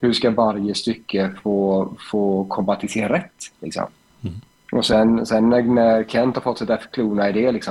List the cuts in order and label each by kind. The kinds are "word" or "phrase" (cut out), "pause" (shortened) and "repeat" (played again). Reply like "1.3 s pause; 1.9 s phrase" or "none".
none

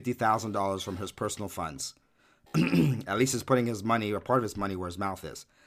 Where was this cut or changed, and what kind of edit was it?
none

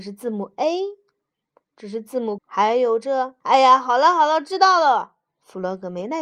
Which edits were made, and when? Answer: 2.4 s word; 3.4 s pause

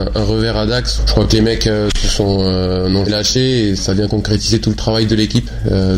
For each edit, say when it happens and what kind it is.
1.0 s word; 3.1 s word; 3.8 s word

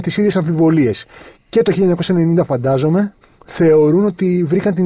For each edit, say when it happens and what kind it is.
3.2 s pause

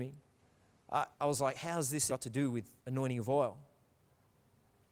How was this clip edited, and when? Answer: 1.1 s pause; 2.1 s word; 2.8 s pause

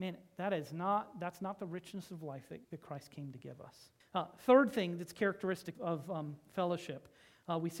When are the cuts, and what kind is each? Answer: 2.6 s pause; 4.0 s pause; 5.7 s word

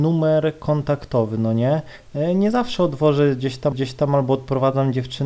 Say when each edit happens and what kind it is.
3.7 s repeat

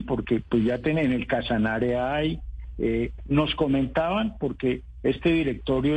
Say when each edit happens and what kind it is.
none

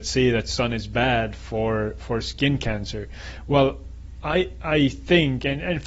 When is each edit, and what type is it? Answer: none

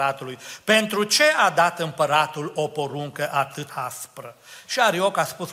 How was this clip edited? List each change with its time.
3.7 s word

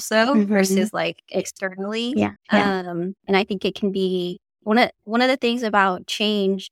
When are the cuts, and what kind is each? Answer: 2.4 s pause; 3.2 s pause; 4.5 s pause

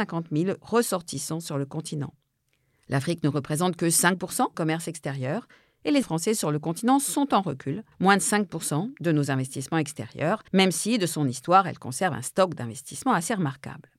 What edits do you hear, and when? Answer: 4.5 s phrase; 6.0 s word; 7.9 s pause; 10.5 s pause

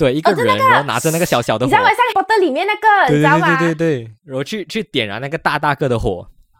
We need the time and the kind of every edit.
2.1 s phrase

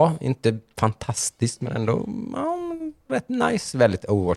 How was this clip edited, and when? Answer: none

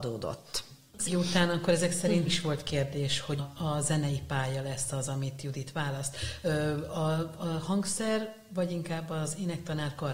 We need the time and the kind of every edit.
1.1 s word; 2.3 s word; 3.4 s word

